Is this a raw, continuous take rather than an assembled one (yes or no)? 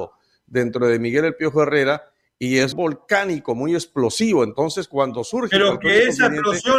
no